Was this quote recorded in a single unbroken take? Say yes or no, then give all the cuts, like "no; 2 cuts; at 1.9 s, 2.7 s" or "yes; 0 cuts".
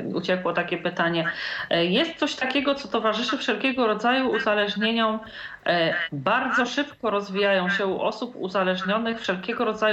yes; 0 cuts